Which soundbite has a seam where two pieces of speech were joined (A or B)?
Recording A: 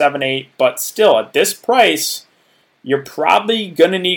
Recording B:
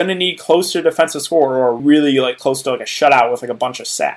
B